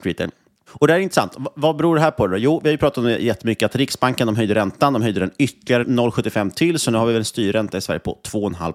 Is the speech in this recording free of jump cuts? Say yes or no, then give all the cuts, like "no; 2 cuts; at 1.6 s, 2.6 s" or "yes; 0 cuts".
no; 1 cut; at 5.8 s